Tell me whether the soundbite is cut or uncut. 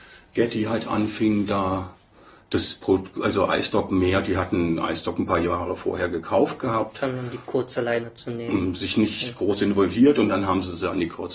uncut